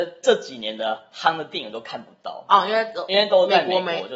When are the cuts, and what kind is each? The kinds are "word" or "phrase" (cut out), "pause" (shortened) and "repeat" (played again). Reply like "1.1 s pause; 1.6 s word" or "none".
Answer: none